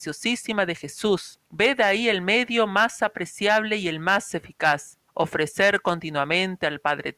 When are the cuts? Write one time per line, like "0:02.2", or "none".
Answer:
0:01.5
0:05.1

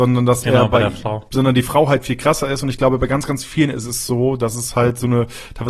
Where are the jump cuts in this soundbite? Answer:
0:01.3

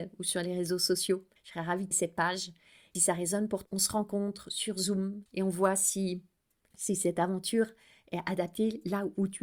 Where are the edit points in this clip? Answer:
0:01.4
0:01.9
0:02.9
0:03.6
0:05.3
0:06.7

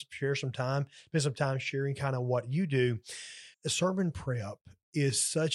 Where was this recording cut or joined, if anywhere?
0:03.5

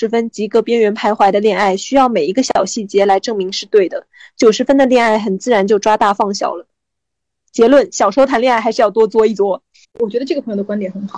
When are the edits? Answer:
0:09.8

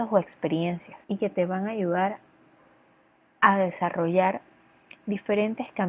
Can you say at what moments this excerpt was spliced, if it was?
0:01.0

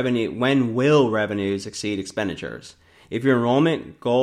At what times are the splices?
none

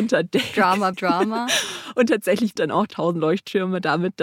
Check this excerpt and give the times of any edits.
0:00.9
0:02.6
0:02.9

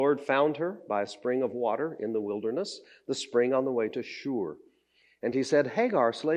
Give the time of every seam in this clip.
none

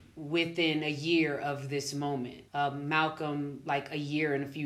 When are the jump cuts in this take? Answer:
0:02.5

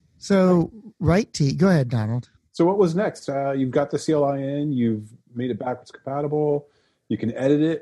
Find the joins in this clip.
none

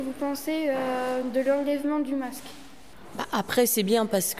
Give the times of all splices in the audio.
none

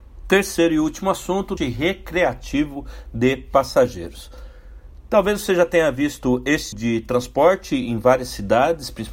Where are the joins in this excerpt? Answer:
0:01.6
0:06.7

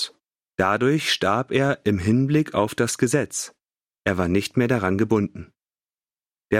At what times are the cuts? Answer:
none

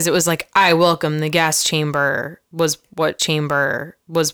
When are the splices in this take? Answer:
0:03.2

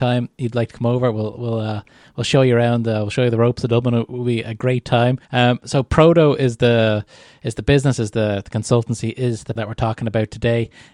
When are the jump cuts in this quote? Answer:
0:05.2
0:09.6

